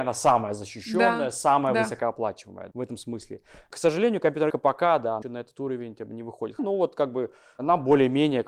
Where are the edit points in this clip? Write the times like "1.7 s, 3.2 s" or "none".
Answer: 2.7 s, 4.5 s, 5.2 s, 6.6 s